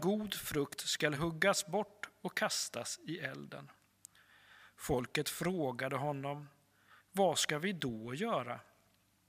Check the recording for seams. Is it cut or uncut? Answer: uncut